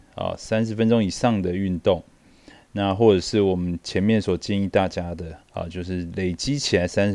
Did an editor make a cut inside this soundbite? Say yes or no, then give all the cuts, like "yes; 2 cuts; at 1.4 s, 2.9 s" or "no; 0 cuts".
yes; 1 cut; at 5.4 s